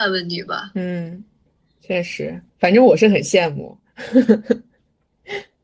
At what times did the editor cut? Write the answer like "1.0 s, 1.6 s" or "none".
1.5 s, 2.5 s